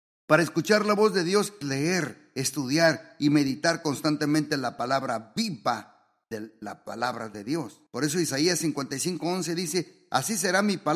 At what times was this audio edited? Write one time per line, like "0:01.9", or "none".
0:01.6
0:06.2
0:07.9